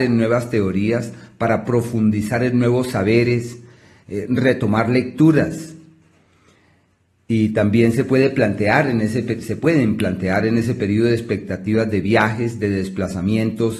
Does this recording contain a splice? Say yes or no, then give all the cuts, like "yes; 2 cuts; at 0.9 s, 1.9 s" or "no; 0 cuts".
no; 0 cuts